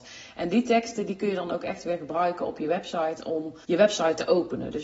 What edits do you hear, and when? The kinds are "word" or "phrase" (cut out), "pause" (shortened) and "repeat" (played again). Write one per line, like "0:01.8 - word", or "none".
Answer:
0:03.6 - pause